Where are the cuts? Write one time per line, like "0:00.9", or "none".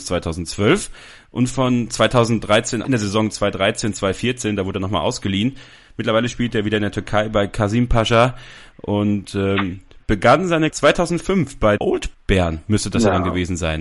0:02.8
0:10.7
0:11.8
0:12.1